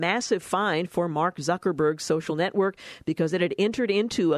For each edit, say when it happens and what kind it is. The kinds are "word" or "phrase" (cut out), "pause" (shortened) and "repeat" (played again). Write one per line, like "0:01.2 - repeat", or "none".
none